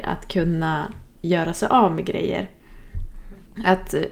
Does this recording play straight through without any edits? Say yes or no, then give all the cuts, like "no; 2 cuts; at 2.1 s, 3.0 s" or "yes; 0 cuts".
yes; 0 cuts